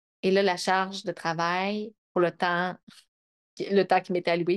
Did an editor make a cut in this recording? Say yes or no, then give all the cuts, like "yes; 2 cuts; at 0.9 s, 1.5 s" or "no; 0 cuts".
no; 0 cuts